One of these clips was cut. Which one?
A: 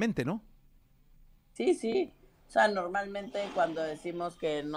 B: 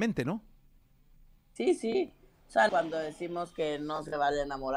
B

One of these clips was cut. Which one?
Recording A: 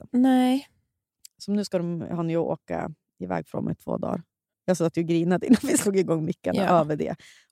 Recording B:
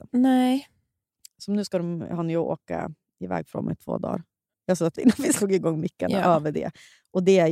B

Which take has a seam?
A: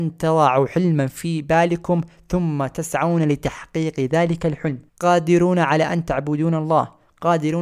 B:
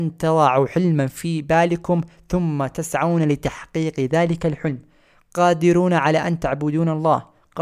A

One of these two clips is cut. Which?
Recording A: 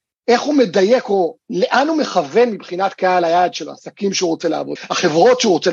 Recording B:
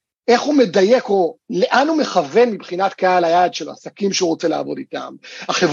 A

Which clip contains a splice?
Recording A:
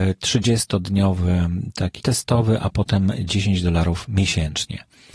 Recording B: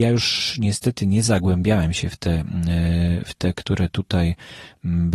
A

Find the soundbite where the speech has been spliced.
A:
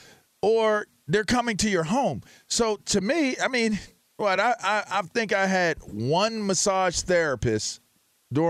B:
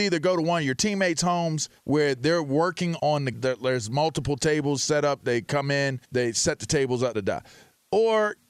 B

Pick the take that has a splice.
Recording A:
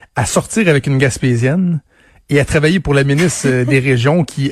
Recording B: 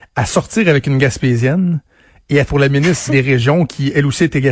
B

